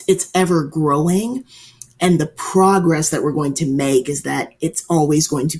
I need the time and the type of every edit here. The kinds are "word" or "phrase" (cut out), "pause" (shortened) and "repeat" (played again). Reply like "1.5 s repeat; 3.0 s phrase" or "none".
none